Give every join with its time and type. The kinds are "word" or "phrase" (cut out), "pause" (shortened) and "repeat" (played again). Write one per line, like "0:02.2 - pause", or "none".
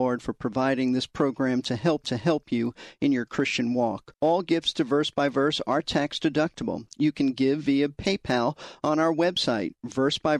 0:02.0 - repeat
0:04.1 - pause